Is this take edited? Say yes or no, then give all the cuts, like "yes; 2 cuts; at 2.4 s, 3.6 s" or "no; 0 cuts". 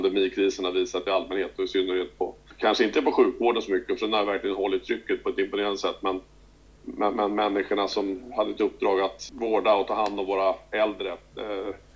no; 0 cuts